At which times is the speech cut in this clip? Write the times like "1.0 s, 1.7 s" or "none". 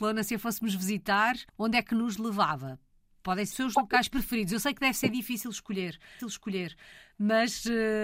1.5 s, 3.5 s, 6.2 s